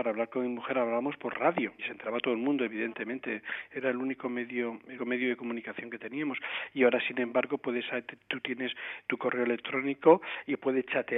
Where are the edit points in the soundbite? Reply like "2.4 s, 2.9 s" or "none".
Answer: 1.8 s, 5.0 s